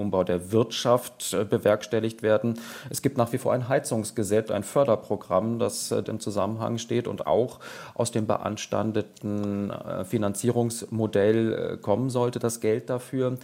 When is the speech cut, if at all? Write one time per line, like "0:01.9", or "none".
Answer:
0:04.5
0:06.0
0:07.2

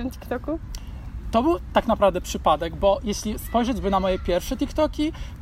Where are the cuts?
none

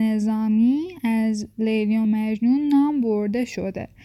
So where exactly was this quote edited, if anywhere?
none

